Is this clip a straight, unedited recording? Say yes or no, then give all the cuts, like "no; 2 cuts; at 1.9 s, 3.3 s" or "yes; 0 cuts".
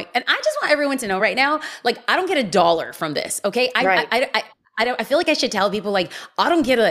yes; 0 cuts